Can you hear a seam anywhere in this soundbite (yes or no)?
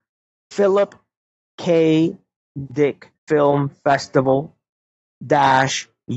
yes